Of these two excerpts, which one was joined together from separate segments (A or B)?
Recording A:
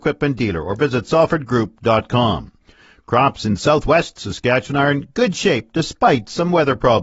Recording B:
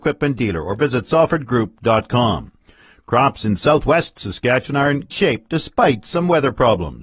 B